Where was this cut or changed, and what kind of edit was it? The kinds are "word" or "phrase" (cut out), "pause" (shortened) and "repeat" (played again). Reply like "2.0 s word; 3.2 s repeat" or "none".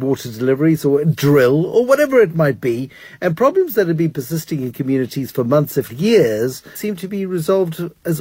5.9 s word; 6.8 s word